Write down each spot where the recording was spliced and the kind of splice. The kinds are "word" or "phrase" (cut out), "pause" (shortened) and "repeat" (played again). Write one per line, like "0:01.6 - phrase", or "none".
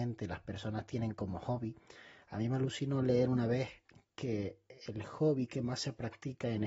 none

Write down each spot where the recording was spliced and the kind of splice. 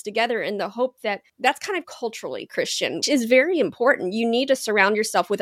0:01.3 - pause
0:01.8 - phrase
0:03.0 - word

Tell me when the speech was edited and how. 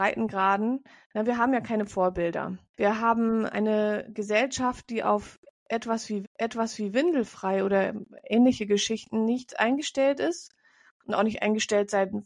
0:02.7 - pause
0:03.5 - word
0:06.2 - repeat

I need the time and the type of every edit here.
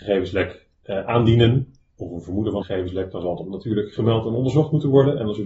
0:02.6 - word

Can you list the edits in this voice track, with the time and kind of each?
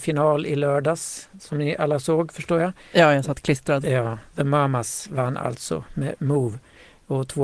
none

